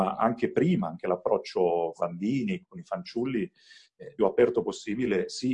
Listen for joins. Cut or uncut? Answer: cut